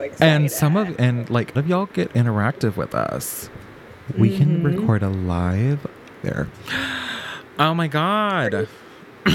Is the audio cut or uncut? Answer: cut